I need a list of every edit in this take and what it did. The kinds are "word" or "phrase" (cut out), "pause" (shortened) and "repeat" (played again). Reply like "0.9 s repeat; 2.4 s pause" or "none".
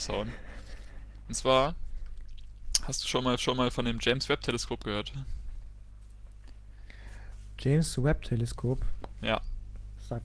3.4 s repeat